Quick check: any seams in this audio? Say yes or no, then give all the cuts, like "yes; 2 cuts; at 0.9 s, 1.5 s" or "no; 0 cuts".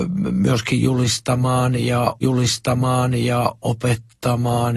yes; 1 cut; at 2.2 s